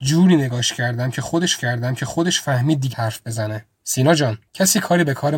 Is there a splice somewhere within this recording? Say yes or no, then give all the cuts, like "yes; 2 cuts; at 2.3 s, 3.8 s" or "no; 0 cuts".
yes; 4 cuts; at 1.6 s, 2.9 s, 3.7 s, 4.5 s